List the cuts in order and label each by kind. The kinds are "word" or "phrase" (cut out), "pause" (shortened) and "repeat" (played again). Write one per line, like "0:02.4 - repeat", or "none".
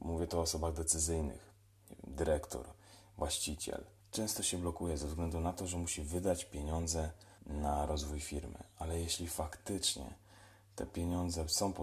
0:04.0 - pause
0:07.4 - pause